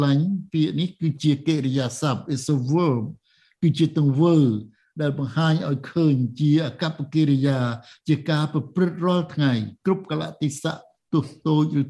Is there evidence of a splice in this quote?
no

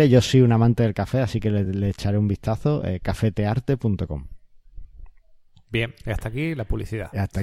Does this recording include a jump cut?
no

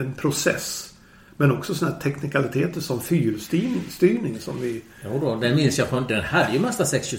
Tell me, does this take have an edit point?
no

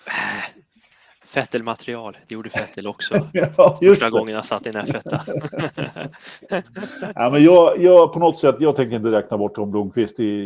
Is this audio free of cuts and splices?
yes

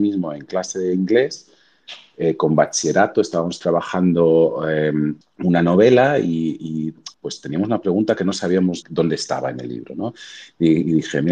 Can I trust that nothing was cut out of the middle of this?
no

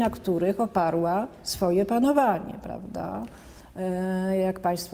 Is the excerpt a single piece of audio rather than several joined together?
yes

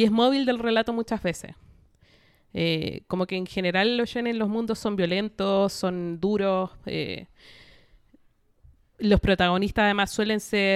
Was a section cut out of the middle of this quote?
no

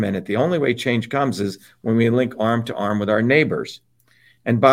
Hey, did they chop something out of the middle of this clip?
no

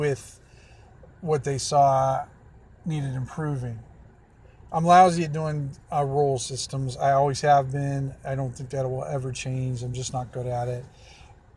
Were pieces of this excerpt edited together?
no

